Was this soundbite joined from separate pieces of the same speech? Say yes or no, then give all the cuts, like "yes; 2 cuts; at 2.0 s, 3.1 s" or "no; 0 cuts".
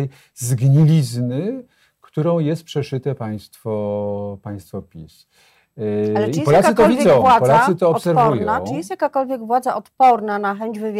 no; 0 cuts